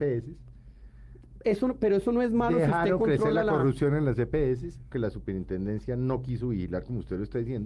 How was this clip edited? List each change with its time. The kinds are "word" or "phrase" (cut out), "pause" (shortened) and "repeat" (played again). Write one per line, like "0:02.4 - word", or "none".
0:04.9 - phrase